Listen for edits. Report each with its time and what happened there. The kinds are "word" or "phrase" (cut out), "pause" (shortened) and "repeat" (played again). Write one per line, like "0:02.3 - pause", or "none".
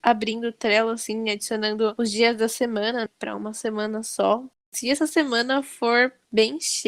0:03.1 - word

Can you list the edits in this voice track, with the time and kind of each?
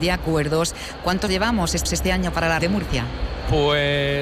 0:01.3 - word
0:01.9 - repeat
0:02.6 - word

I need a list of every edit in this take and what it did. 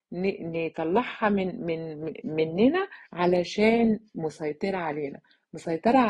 0:03.1 - pause

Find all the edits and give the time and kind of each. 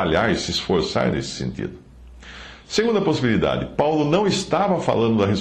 none

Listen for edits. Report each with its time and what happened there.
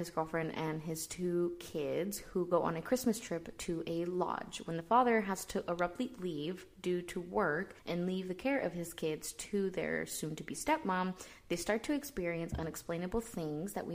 0:07.8 - pause

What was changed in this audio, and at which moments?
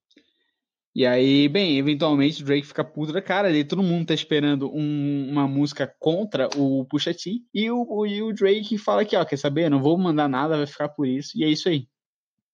0:07.5 - pause

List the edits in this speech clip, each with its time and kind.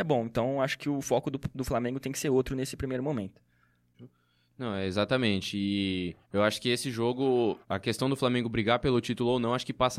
0:06.2 - pause
0:07.6 - word

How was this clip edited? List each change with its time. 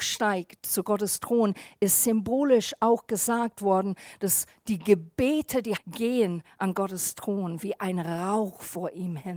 0:05.8 - word

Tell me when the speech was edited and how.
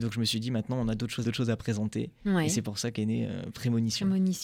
0:01.2 - phrase

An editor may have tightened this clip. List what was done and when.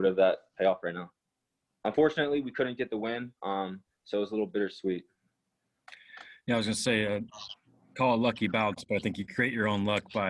none

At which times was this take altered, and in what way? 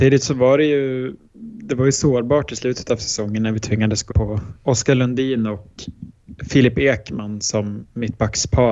0:04.1 - word

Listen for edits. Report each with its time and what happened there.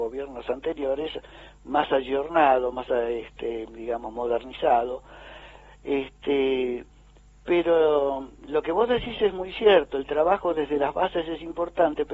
none

